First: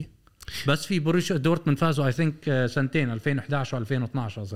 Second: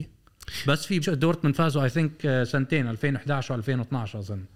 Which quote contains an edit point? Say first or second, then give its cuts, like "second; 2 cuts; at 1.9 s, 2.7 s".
second; 1 cut; at 1.0 s